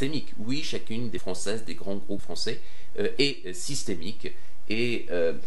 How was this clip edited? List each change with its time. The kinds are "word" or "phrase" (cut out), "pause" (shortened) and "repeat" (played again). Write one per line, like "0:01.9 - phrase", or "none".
0:01.2 - word
0:02.2 - word